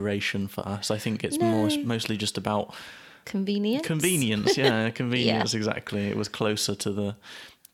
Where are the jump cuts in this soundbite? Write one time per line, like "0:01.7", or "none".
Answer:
0:03.2